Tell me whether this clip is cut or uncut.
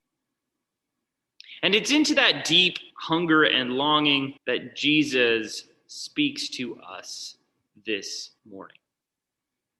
cut